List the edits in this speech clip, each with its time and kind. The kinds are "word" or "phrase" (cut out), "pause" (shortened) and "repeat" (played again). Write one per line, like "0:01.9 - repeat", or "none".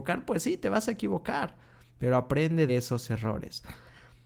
0:02.7 - word

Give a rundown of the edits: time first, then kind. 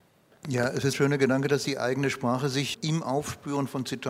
0:00.9 - word
0:02.7 - word

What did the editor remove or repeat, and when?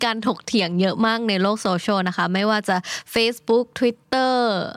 none

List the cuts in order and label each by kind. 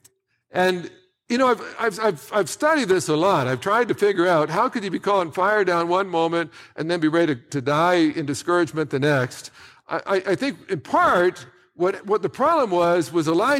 none

